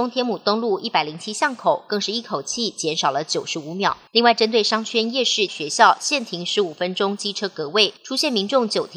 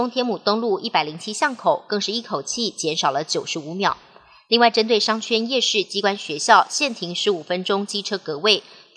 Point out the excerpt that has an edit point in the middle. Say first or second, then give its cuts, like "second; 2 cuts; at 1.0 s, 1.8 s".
first; 3 cuts; at 4.1 s, 5.5 s, 8.0 s